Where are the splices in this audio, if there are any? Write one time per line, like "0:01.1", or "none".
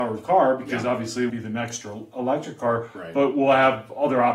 0:01.3